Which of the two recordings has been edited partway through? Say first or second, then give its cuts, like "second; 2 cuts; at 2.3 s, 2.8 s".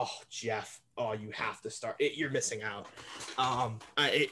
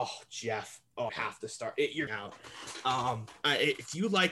second; 2 cuts; at 1.1 s, 2.1 s